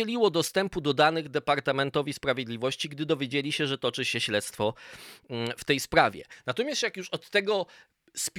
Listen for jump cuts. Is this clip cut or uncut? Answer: uncut